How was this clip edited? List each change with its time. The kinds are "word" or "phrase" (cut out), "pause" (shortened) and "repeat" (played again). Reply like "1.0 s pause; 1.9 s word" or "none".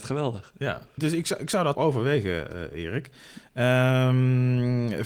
1.0 s word; 1.7 s word